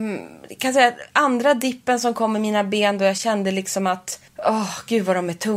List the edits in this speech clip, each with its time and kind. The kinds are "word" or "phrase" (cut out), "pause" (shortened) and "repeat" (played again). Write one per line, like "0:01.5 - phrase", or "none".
0:04.3 - pause